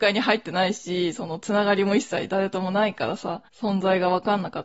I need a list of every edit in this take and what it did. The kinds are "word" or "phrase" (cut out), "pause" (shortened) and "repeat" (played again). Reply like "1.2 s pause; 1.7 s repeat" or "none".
3.5 s pause